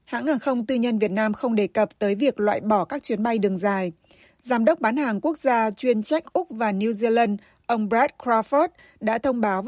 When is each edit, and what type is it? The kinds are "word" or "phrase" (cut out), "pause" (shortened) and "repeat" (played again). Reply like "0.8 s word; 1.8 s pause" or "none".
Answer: none